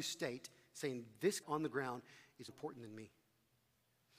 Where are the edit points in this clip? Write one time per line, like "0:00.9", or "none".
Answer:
0:01.4
0:02.5